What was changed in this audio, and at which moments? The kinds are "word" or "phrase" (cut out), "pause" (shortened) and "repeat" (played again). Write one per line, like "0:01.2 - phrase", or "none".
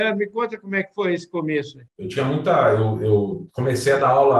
0:01.9 - pause